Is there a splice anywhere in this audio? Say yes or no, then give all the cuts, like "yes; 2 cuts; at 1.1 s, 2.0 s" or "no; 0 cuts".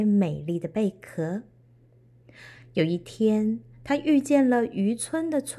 no; 0 cuts